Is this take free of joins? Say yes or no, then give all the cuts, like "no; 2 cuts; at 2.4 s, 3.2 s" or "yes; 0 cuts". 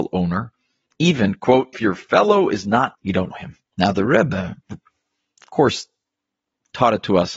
no; 5 cuts; at 1.7 s, 2.9 s, 3.3 s, 3.7 s, 4.6 s